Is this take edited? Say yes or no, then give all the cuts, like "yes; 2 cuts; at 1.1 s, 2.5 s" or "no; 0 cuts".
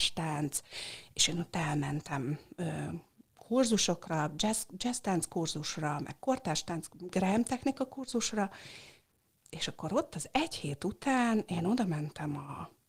no; 0 cuts